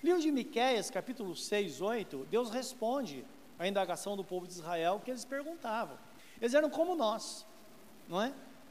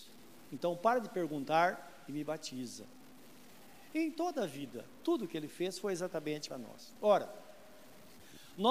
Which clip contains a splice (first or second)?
second